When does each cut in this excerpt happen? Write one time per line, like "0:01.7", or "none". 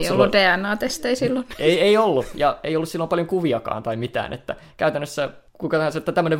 0:05.5